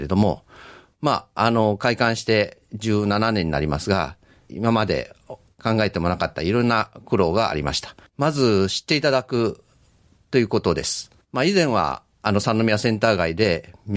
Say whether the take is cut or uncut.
cut